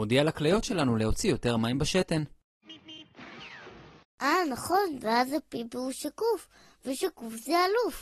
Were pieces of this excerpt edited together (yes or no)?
no